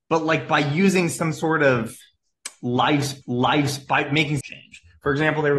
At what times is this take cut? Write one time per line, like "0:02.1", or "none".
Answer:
0:03.2
0:04.4